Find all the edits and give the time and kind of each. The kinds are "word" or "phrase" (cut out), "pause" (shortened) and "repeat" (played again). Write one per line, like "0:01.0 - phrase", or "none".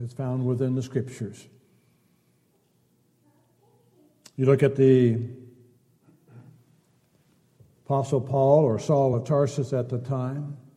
none